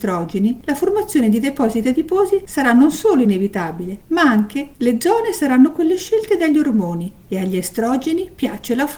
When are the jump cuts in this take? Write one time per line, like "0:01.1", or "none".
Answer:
none